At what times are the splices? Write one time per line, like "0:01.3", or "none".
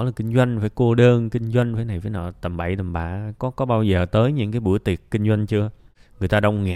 none